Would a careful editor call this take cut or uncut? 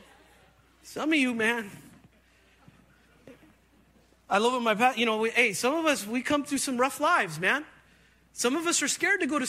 uncut